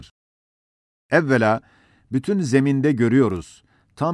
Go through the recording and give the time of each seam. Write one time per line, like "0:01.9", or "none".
none